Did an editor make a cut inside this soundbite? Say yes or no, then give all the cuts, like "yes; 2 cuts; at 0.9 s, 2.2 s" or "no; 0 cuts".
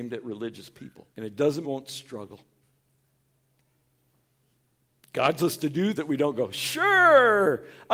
yes; 4 cuts; at 1.1 s, 1.6 s, 5.4 s, 6.0 s